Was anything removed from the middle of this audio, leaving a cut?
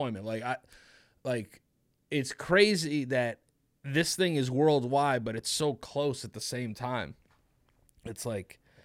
no; 0 cuts

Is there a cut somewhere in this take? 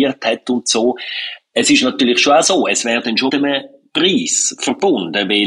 yes; 1 cut; at 3.3 s

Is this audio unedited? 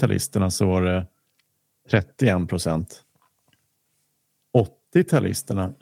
yes; 0 cuts

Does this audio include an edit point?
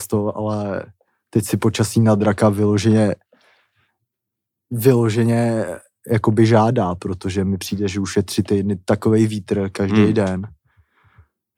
no; 0 cuts

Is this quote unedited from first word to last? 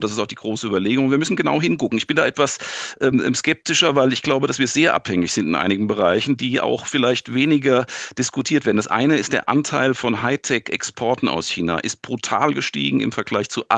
yes; 0 cuts

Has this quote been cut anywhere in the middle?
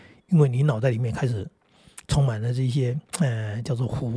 yes; 1 cut; at 3.1 s

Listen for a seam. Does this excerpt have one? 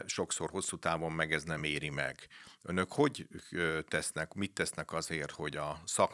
no; 0 cuts

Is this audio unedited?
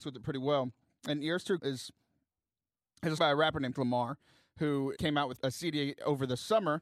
no; 5 cuts; at 1.6 s, 3.2 s, 3.7 s, 5.0 s, 5.4 s

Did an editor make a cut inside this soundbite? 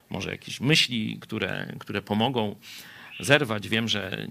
no; 0 cuts

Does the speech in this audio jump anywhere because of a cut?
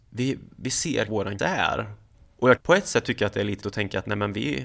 yes; 4 cuts; at 1.1 s, 1.4 s, 2.6 s, 3.6 s

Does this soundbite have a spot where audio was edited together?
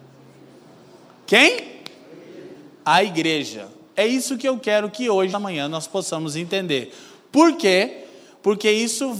yes; 1 cut; at 5.3 s

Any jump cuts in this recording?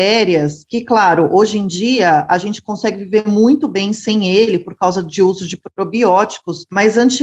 no; 0 cuts

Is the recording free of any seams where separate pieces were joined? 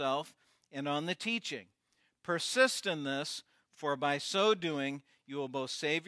yes; 0 cuts

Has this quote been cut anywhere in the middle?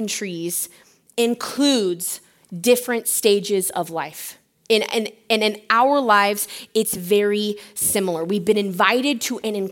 no; 0 cuts

